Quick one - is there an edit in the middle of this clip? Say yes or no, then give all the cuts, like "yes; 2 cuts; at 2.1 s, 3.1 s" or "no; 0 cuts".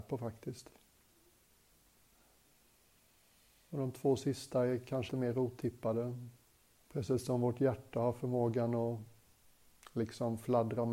yes; 2 cuts; at 5.1 s, 6.7 s